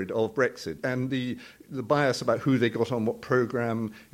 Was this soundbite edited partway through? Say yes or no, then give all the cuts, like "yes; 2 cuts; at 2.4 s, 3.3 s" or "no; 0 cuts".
no; 0 cuts